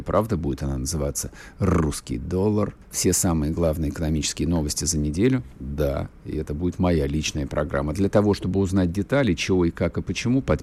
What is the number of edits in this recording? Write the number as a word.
two